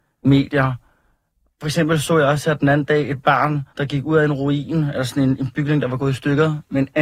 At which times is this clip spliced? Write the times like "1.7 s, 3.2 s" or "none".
3.7 s